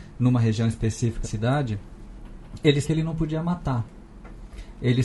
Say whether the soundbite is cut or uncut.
cut